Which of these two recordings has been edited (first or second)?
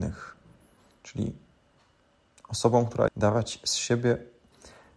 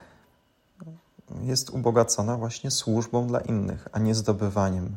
first